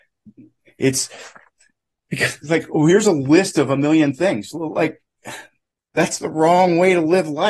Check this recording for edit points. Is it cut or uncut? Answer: uncut